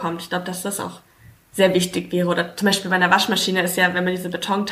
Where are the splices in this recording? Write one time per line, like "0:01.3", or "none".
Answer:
none

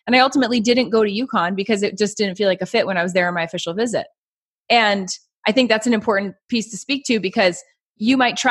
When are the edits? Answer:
none

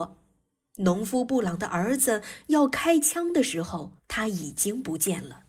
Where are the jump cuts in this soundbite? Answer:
0:04.0

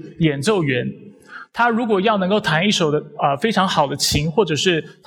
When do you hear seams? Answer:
none

